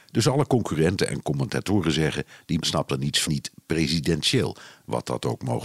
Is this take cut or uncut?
cut